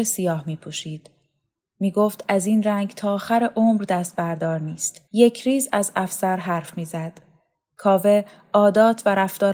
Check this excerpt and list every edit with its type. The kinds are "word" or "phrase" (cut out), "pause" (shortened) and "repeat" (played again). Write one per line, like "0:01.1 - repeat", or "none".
0:05.1 - pause